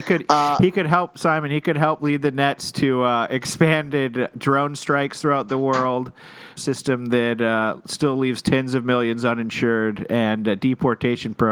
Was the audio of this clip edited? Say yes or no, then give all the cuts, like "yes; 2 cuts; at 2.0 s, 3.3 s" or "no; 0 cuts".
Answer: yes; 1 cut; at 6.6 s